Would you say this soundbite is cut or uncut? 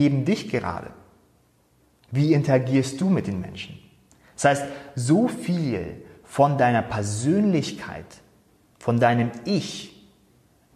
uncut